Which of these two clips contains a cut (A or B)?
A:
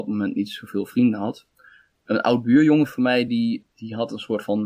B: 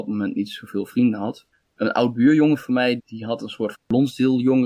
B